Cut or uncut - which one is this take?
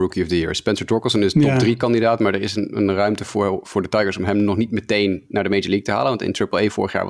uncut